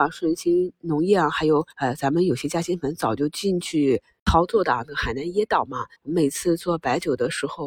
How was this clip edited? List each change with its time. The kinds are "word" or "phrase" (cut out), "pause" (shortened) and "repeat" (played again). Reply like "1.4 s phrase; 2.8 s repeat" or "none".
1.7 s pause; 5.9 s pause